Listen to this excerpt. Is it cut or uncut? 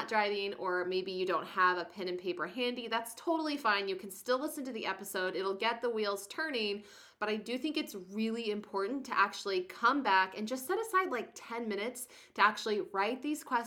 uncut